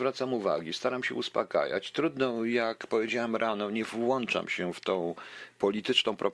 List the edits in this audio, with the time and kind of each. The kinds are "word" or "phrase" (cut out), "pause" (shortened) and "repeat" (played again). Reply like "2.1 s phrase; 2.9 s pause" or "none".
none